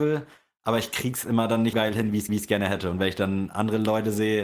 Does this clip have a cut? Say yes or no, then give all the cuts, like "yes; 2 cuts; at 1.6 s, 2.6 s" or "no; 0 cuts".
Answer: yes; 2 cuts; at 1.7 s, 2.3 s